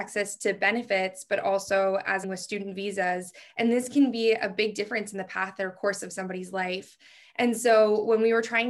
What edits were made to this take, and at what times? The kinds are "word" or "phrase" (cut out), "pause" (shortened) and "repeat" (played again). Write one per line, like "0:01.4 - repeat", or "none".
0:02.2 - phrase

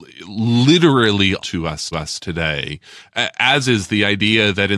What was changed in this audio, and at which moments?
0:01.4 - word
0:01.9 - repeat

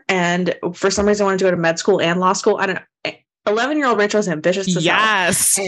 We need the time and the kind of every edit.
none

